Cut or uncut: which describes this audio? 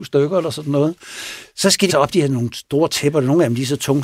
cut